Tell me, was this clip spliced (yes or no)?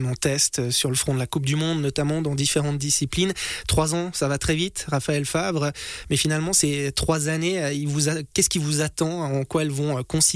no